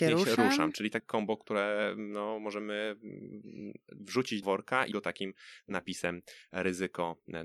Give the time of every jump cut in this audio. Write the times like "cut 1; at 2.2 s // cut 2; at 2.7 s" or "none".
cut 1; at 1.0 s // cut 2; at 4.4 s // cut 3; at 4.9 s